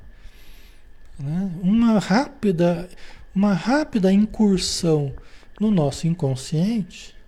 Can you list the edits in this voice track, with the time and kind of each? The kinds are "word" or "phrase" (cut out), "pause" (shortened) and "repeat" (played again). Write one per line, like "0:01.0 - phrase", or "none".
none

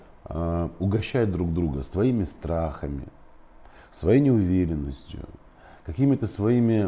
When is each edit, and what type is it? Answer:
none

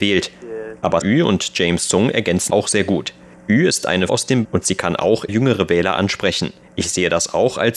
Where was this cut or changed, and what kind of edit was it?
0:01.0 - word
0:02.5 - word
0:04.1 - word
0:04.4 - word
0:05.3 - word

